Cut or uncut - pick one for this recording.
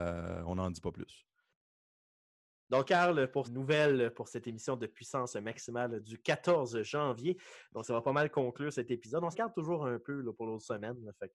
cut